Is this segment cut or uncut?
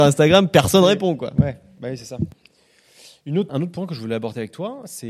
cut